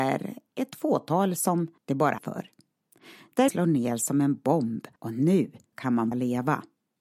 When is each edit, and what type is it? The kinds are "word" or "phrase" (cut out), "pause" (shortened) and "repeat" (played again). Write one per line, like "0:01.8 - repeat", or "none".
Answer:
0:01.8 - pause
0:02.2 - word
0:03.5 - word
0:05.0 - pause
0:05.7 - word
0:06.1 - word